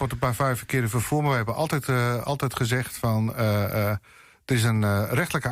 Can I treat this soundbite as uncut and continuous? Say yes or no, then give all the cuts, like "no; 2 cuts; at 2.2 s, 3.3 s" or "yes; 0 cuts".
yes; 0 cuts